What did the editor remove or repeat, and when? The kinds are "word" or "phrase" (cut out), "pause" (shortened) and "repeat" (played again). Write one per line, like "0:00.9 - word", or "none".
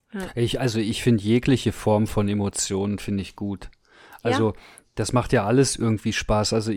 none